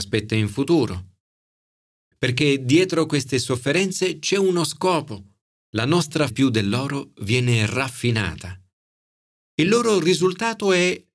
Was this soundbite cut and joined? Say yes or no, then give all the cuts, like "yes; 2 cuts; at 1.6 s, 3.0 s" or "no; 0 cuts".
yes; 1 cut; at 6.3 s